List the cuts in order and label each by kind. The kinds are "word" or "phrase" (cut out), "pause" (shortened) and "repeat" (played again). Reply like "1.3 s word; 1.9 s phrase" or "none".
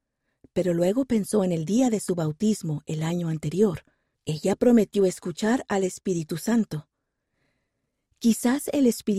4.1 s pause